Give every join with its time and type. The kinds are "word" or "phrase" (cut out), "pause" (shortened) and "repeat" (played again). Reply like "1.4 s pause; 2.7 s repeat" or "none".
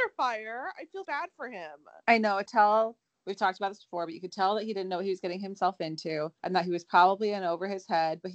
1.0 s word; 2.5 s phrase; 6.4 s pause